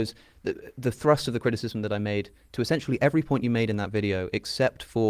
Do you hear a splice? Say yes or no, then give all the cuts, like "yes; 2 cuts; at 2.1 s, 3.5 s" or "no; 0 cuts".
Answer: no; 0 cuts